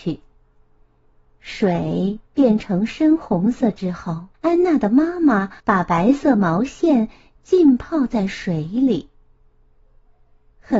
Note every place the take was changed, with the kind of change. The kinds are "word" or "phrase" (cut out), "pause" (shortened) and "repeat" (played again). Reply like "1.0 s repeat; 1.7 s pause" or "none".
4.3 s pause; 5.6 s pause